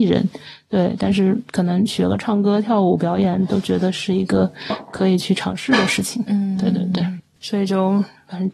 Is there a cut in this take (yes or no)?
no